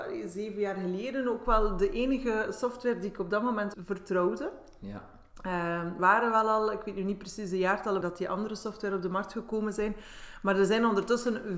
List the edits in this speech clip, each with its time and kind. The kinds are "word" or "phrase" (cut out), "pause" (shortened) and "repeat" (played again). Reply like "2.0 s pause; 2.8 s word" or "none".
3.7 s word; 6.0 s word; 8.0 s word